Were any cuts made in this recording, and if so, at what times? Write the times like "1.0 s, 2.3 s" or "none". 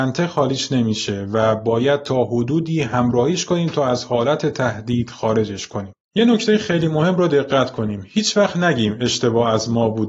none